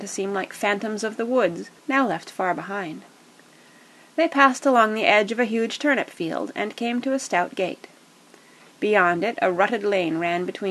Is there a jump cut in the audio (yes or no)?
yes